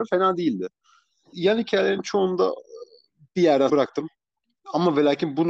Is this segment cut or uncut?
cut